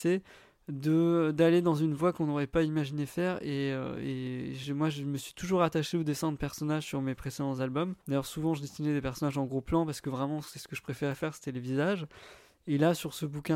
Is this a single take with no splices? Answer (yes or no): no